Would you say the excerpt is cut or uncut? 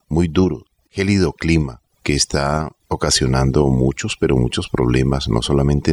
uncut